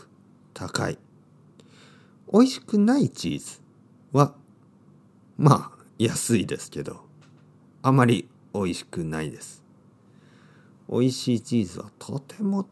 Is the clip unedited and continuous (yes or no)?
yes